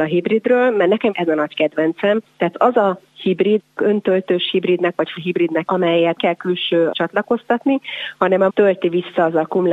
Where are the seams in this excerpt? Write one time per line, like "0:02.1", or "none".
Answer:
0:01.1
0:02.5
0:03.6
0:05.2
0:05.7
0:06.2
0:06.9
0:08.5

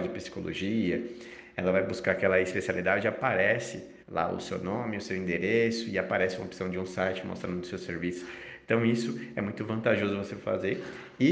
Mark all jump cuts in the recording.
0:04.0

